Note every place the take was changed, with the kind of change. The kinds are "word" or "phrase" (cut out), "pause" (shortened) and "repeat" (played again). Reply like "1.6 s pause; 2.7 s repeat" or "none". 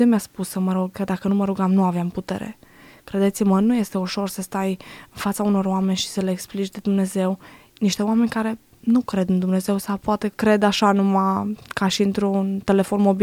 none